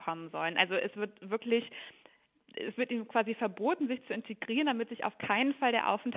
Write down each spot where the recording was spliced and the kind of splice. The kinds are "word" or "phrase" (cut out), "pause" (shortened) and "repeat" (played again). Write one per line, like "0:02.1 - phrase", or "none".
none